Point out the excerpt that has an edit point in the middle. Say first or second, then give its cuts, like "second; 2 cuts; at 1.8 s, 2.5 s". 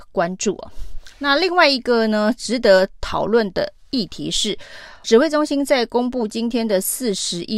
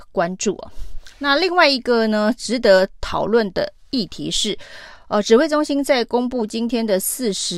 first; 1 cut; at 5.0 s